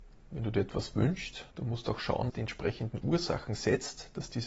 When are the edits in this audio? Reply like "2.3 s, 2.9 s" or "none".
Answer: 1.5 s, 2.3 s